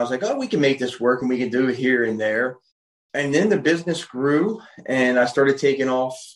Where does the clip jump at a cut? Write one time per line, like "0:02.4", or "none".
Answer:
0:02.7